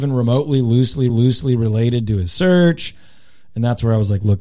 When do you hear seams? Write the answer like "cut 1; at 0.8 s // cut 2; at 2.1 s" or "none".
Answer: cut 1; at 1.1 s